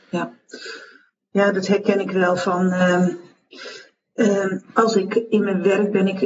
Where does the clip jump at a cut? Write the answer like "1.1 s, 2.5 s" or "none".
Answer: none